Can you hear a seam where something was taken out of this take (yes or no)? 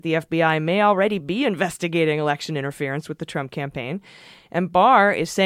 no